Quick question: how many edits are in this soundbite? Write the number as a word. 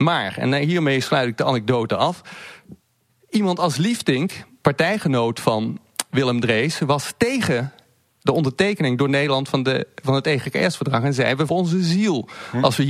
one